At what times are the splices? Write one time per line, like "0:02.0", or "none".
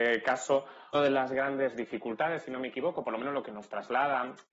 0:00.9